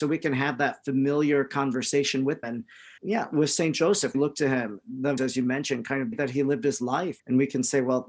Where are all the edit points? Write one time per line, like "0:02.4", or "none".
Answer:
0:02.4
0:03.0
0:04.1
0:05.2
0:06.1
0:07.2